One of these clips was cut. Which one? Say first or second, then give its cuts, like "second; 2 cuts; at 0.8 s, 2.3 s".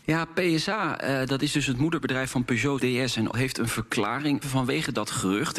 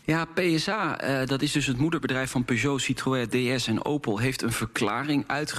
first; 3 cuts; at 2.8 s, 3.3 s, 4.4 s